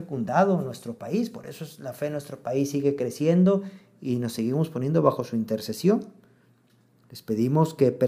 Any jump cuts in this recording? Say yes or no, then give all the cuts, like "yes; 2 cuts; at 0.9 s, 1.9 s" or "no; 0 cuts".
no; 0 cuts